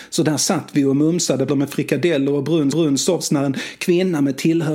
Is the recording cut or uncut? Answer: cut